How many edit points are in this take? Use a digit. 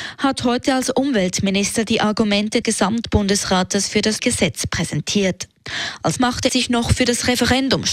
4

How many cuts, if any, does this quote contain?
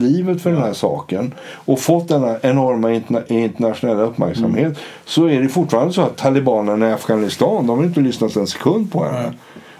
0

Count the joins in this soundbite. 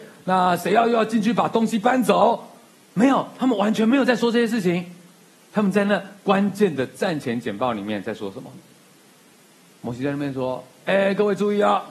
0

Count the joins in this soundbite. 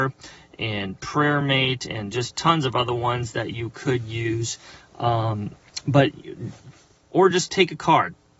0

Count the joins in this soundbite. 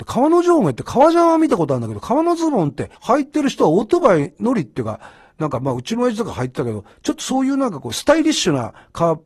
1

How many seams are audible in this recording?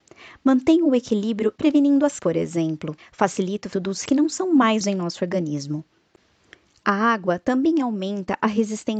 6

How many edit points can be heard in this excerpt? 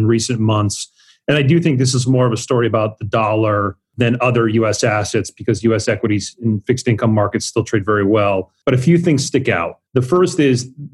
0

